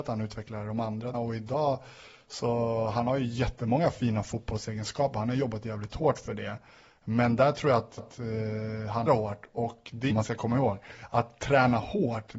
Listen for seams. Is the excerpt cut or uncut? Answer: cut